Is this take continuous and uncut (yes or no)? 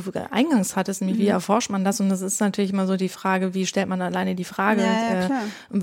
yes